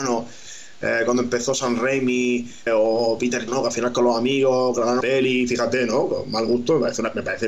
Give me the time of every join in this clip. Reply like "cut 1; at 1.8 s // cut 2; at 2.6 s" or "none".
cut 1; at 2.7 s // cut 2; at 3.5 s // cut 3; at 5.0 s